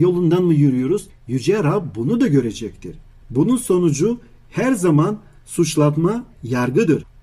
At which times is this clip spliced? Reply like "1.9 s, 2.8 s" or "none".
6.3 s